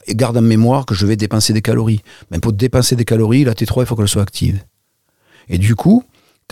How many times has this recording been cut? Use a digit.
1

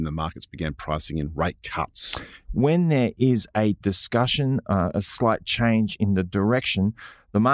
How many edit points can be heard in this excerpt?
1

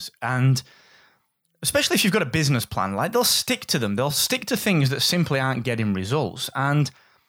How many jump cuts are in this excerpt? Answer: 0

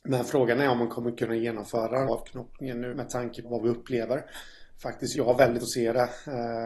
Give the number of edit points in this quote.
5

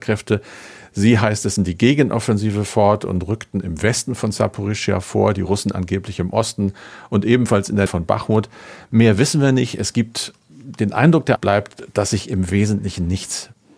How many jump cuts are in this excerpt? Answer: 3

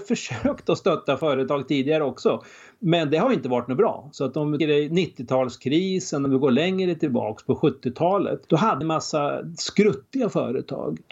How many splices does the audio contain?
3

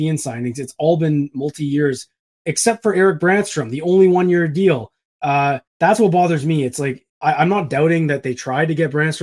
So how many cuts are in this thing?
2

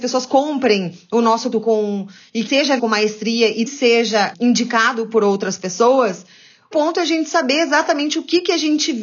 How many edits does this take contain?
6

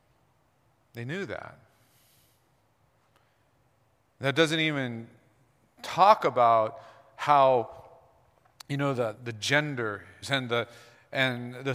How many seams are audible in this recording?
2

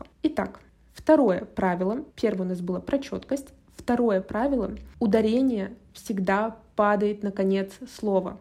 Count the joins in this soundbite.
1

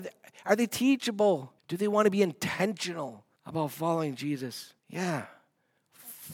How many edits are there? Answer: 3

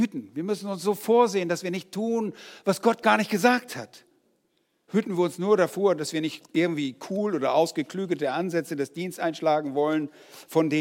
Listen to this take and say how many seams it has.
0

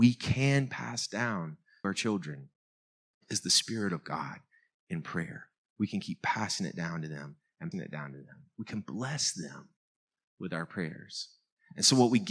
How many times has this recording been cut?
2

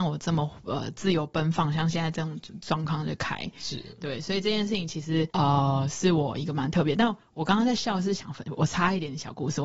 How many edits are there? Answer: 1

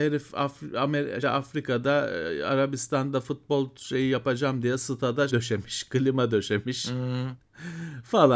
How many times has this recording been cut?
2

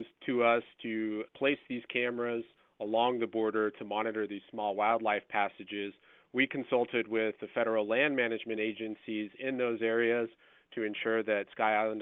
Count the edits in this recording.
0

